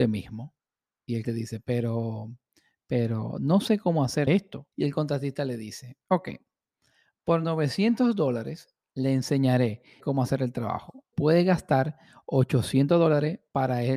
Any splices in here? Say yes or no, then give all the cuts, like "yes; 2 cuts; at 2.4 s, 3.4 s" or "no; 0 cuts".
yes; 5 cuts; at 1.2 s, 4.3 s, 4.7 s, 10.0 s, 11.1 s